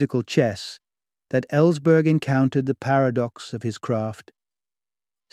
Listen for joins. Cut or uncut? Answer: uncut